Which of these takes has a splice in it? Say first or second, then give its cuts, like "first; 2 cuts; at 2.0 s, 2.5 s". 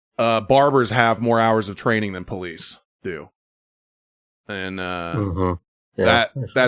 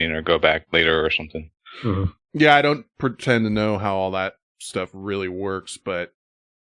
second; 1 cut; at 2.2 s